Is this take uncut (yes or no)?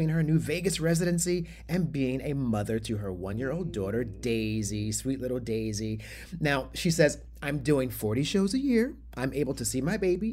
yes